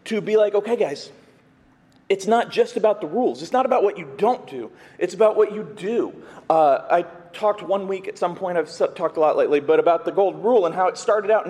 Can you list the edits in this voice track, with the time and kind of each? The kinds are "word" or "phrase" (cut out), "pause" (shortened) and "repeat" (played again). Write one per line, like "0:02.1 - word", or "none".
none